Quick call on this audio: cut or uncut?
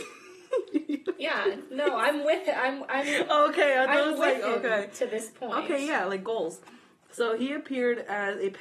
uncut